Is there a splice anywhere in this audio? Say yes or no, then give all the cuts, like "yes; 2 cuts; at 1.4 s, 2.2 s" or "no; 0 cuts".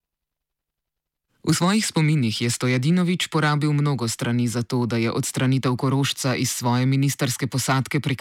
no; 0 cuts